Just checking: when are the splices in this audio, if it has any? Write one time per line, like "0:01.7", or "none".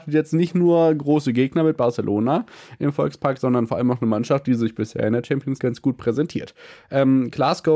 0:05.6